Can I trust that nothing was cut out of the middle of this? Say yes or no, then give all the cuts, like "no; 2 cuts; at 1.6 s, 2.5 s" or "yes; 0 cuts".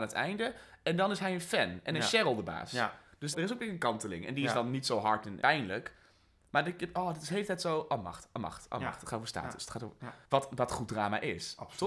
no; 3 cuts; at 3.3 s, 5.4 s, 10.2 s